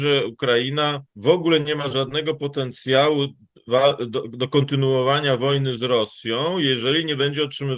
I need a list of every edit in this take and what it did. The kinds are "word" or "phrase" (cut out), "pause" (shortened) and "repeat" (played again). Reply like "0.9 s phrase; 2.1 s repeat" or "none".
1.1 s pause

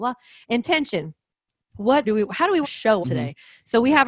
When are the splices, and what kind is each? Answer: 2.0 s word; 2.6 s word; 3.0 s word

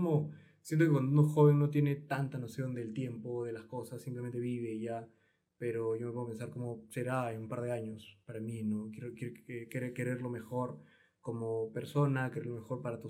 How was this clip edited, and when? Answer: none

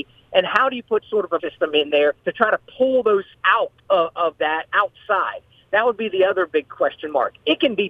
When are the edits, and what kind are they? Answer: 1.0 s word; 1.4 s word; 2.2 s pause; 3.3 s word; 3.8 s pause; 4.7 s word

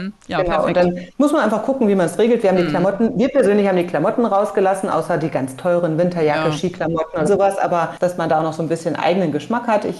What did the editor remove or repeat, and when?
1.2 s pause; 7.2 s word

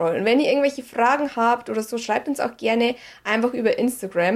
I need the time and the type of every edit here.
none

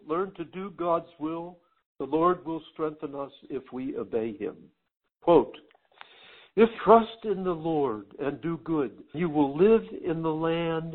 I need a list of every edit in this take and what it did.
6.8 s word; 9.1 s word

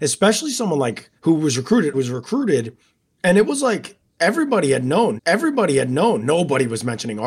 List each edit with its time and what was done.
1.2 s pause; 1.9 s word; 5.2 s repeat

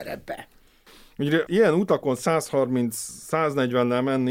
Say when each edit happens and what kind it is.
1.5 s word

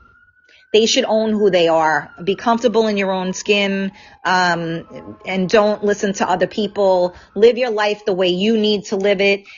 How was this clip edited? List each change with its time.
none

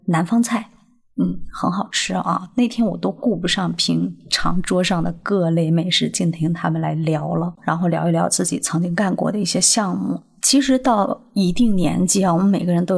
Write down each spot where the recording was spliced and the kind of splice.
7.6 s phrase

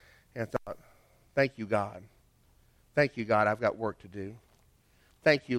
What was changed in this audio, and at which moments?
none

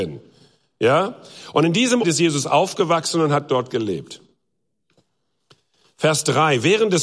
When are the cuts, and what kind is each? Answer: 2.0 s word

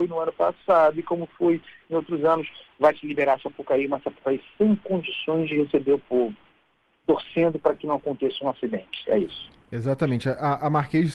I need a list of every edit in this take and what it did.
none

